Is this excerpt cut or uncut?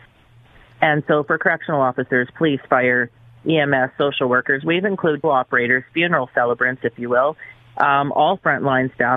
cut